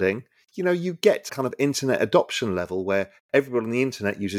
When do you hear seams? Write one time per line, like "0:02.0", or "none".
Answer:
0:01.3